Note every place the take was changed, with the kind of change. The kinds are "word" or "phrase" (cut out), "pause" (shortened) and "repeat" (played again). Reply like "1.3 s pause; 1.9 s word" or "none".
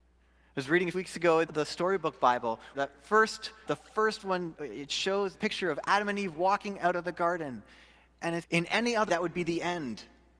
0.9 s word; 1.5 s word; 2.7 s word; 3.7 s word; 4.5 s word; 5.3 s word; 8.4 s word; 9.1 s word